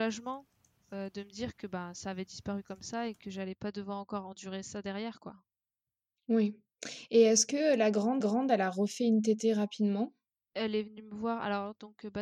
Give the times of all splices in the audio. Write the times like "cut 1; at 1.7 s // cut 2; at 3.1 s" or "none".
cut 1; at 8.2 s // cut 2; at 10.4 s